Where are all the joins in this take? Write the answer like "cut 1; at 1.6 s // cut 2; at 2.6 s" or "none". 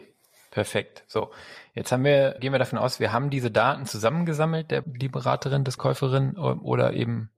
cut 1; at 2.4 s // cut 2; at 4.8 s // cut 3; at 5.8 s